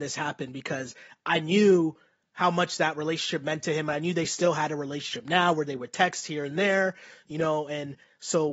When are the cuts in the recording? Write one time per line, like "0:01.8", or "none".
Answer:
none